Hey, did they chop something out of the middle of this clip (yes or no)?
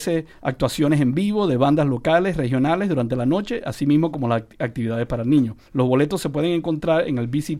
yes